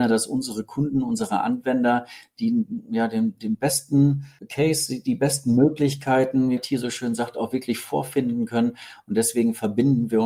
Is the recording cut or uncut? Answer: cut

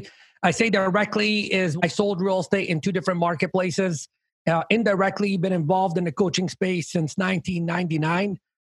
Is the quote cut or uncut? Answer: uncut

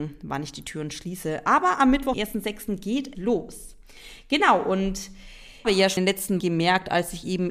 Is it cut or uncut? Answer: cut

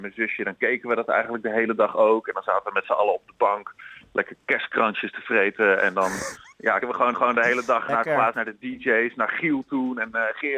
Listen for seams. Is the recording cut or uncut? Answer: cut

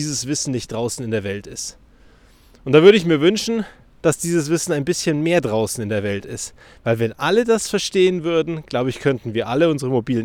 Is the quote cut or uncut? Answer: uncut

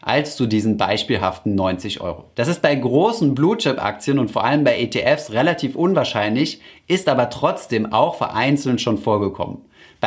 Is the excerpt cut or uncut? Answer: uncut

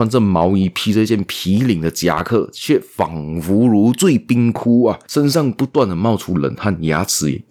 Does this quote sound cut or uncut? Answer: cut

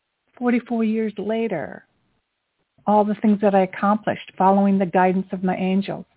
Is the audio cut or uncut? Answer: cut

